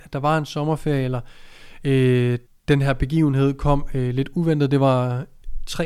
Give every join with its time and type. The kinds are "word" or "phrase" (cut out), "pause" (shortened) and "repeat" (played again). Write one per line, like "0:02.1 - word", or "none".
0:02.5 - pause